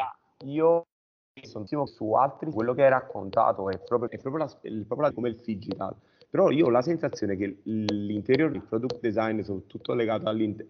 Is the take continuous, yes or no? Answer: no